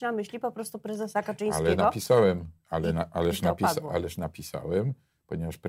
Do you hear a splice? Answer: yes; 1 cut; at 2.6 s

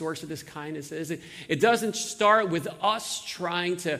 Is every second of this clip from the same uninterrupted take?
yes; 0 cuts

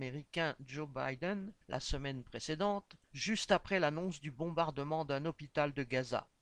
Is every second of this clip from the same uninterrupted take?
no; 2 cuts; at 1.6 s, 3.0 s

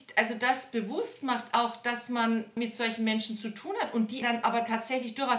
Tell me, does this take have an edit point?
yes; 2 cuts; at 2.6 s, 4.2 s

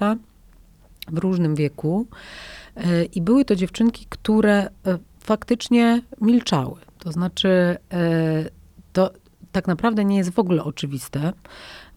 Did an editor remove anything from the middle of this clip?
no; 0 cuts

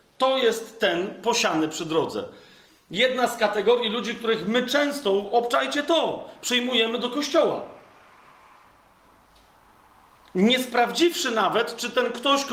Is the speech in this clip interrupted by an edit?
no; 0 cuts

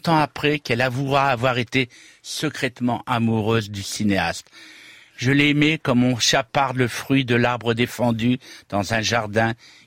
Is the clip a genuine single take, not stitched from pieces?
yes; 0 cuts

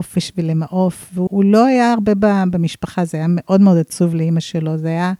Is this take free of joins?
no; 1 cut; at 1.3 s

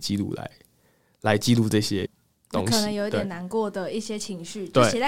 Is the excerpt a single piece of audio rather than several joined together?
yes; 0 cuts

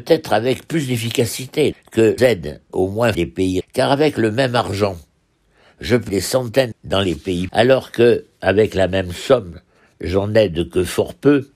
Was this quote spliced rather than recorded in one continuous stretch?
yes; 8 cuts; at 1.7 s, 2.2 s, 2.7 s, 3.1 s, 3.6 s, 6.1 s, 6.7 s, 7.5 s

